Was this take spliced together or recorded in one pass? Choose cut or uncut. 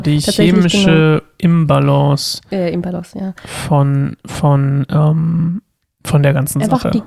uncut